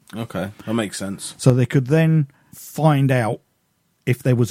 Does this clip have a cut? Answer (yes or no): no